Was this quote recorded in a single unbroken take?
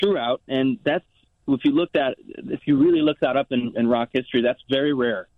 yes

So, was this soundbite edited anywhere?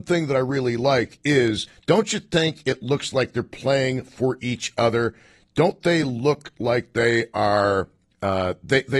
no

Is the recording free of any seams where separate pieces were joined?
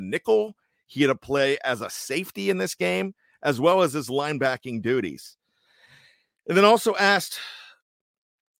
yes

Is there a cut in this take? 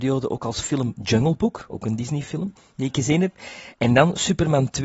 no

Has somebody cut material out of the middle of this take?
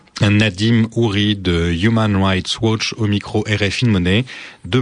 yes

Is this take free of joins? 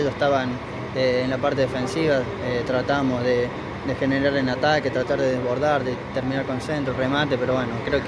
yes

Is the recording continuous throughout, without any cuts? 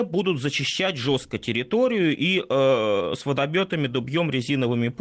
yes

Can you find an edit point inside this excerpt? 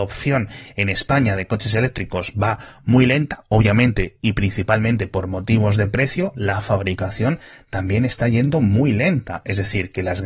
no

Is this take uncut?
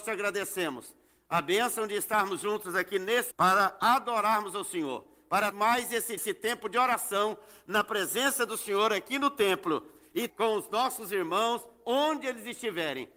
no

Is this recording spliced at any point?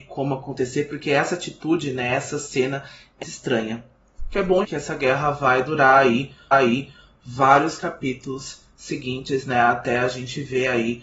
yes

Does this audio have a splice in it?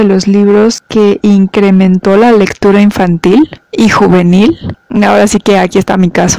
no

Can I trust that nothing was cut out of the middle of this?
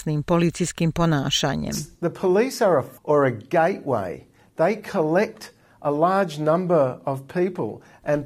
no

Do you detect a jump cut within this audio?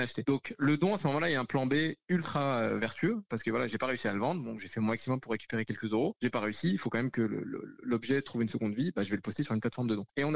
no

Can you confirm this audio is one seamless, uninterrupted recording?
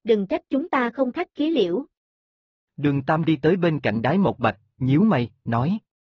yes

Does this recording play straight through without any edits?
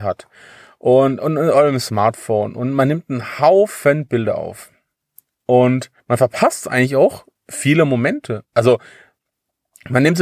no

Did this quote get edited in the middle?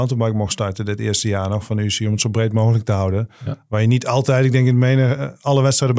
no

